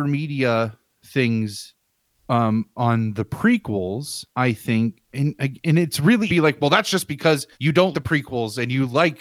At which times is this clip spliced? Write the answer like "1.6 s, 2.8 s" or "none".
4.3 s, 6.3 s, 7.5 s, 7.9 s